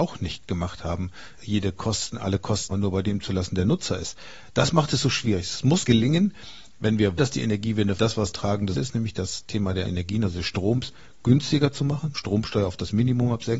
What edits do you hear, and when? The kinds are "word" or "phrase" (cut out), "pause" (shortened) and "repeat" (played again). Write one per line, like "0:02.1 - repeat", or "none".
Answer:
0:01.4 - word
0:02.7 - word
0:05.8 - word
0:07.2 - word
0:08.0 - word
0:08.3 - word
0:08.7 - word
0:09.8 - word
0:12.1 - word